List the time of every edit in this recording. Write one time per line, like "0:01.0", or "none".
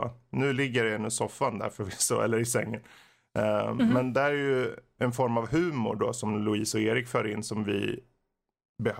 none